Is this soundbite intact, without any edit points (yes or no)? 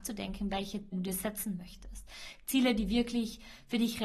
no